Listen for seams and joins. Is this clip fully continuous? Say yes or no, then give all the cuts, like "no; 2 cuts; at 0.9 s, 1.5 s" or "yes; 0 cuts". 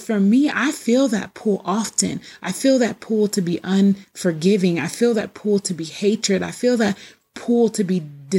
yes; 0 cuts